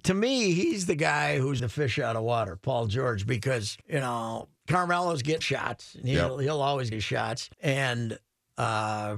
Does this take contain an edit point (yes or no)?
yes